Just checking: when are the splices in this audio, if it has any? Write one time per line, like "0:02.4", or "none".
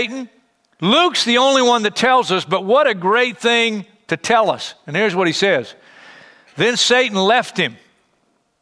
none